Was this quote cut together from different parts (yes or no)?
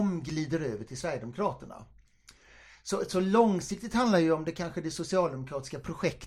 no